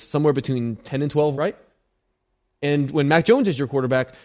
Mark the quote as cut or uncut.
cut